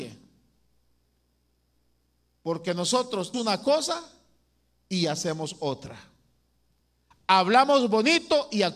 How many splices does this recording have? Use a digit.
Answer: 1